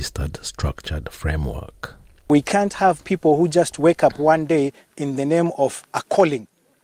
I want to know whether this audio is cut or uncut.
uncut